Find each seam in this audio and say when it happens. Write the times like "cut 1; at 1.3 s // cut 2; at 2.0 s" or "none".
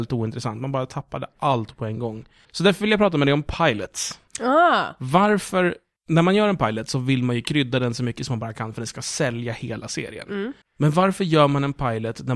cut 1; at 2.4 s // cut 2; at 4.3 s // cut 3; at 6.0 s // cut 4; at 10.6 s